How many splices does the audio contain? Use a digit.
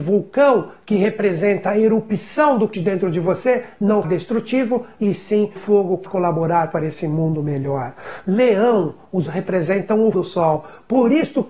6